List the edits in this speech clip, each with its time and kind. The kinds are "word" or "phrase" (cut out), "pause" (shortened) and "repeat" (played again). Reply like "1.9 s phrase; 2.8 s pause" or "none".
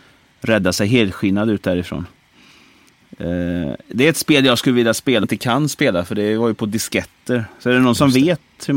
5.2 s word